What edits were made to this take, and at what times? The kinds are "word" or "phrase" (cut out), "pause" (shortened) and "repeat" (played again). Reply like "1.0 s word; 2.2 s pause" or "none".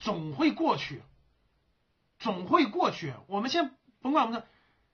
none